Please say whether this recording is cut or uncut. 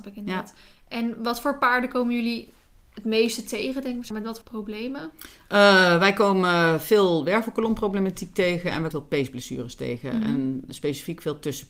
cut